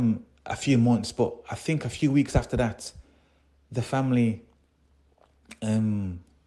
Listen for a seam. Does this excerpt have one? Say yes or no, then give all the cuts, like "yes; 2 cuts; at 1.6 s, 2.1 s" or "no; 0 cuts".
no; 0 cuts